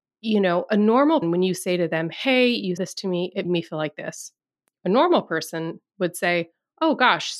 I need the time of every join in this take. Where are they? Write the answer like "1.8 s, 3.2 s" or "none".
1.2 s, 2.8 s, 3.4 s

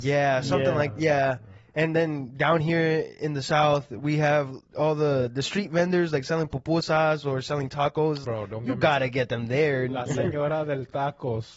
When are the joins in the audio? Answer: 8.2 s

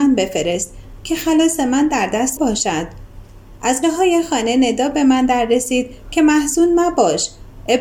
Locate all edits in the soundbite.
2.4 s, 3.8 s

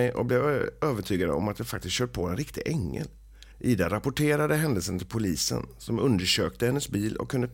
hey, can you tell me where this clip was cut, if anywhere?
3.5 s

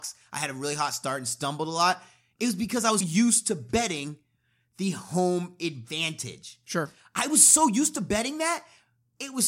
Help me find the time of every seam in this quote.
3.0 s

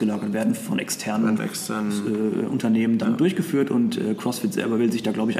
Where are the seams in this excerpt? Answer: 1.4 s

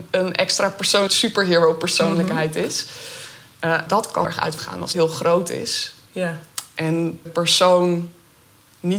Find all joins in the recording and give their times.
1.1 s, 3.9 s, 4.2 s, 4.6 s, 4.9 s, 7.3 s

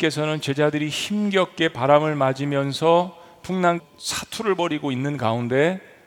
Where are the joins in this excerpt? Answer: 3.8 s

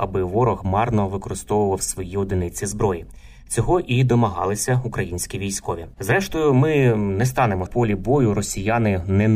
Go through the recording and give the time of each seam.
5.9 s, 7.7 s

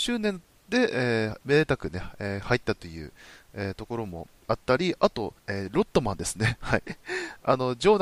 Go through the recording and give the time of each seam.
5.4 s

